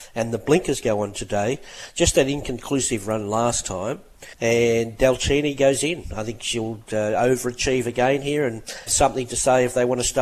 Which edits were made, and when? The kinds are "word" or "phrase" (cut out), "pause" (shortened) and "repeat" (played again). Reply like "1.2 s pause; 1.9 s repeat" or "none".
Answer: 4.3 s pause; 8.9 s word